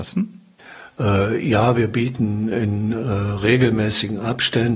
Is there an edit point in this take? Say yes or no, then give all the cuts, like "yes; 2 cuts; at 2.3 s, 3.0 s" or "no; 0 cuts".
no; 0 cuts